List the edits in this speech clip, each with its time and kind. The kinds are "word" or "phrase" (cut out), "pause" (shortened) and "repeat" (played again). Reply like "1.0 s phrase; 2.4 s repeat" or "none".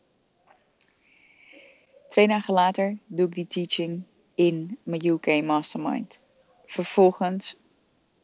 none